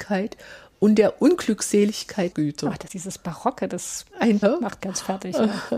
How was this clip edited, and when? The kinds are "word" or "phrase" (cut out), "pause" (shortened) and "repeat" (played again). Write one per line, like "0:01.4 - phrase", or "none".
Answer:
0:02.3 - word
0:02.9 - word
0:04.4 - word
0:04.8 - word